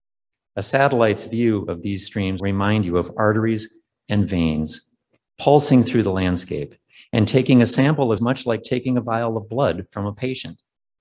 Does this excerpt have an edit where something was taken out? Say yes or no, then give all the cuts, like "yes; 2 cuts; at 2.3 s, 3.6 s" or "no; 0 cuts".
yes; 3 cuts; at 2.4 s, 3.9 s, 8.2 s